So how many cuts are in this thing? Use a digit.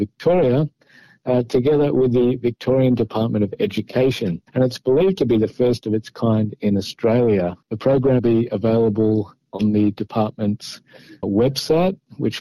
4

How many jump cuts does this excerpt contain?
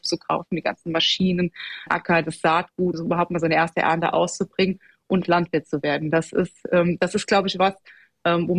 2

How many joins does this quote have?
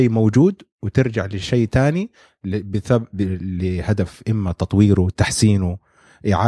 0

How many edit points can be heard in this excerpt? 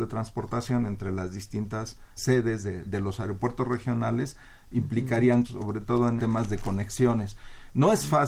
4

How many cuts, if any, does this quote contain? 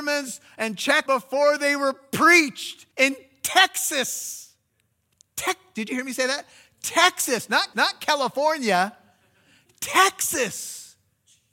4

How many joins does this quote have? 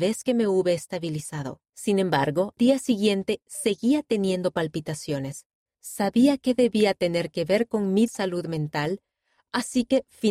4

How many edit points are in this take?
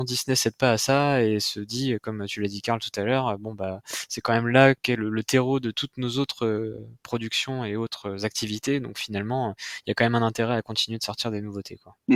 0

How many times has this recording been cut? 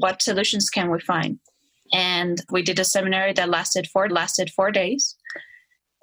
2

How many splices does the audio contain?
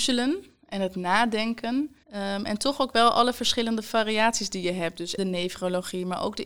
2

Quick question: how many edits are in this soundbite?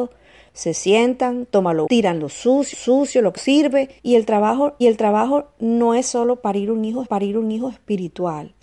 6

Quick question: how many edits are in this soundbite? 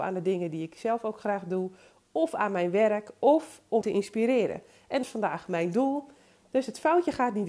2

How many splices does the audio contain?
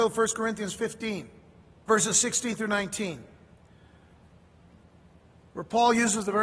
1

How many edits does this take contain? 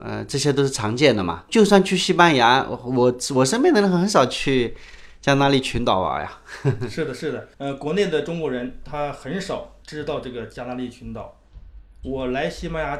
2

